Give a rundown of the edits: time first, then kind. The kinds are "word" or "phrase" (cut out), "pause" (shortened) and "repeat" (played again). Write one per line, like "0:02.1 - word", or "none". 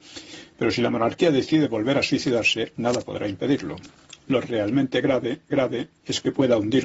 0:05.5 - repeat